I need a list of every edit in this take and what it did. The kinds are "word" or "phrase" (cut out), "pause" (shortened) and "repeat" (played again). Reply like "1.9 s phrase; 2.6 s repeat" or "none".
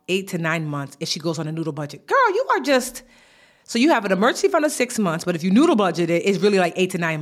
none